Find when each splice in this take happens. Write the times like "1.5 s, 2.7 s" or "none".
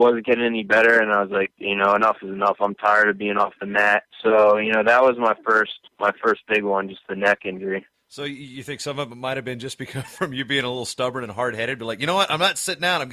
4.1 s, 5.9 s, 7.9 s